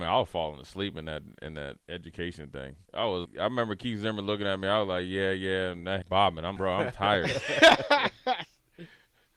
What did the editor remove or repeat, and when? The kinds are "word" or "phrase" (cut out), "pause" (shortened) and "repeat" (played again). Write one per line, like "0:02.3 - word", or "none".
0:01.8 - pause
0:02.8 - pause
0:03.2 - word
0:06.0 - phrase
0:06.6 - word